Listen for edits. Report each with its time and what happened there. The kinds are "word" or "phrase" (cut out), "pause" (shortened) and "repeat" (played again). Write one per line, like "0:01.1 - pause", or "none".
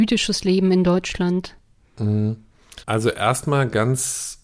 0:02.8 - pause